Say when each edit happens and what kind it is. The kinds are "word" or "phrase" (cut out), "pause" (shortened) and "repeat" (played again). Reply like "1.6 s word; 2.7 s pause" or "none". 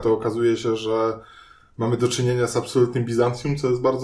none